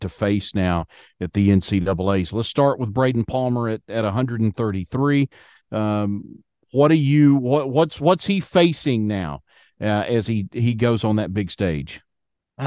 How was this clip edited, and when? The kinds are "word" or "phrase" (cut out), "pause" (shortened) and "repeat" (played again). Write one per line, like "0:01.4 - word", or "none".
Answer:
none